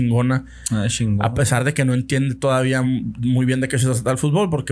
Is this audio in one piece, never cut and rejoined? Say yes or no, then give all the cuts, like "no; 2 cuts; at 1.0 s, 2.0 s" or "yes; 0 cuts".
yes; 0 cuts